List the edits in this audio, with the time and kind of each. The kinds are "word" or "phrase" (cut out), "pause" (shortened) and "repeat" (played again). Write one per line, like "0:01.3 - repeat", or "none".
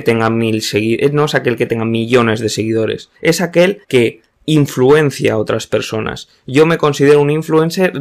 0:03.2 - pause
0:03.8 - pause